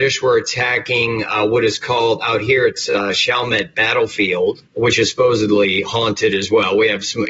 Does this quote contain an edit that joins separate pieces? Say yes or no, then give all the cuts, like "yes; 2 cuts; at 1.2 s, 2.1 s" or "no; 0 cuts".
yes; 1 cut; at 4.7 s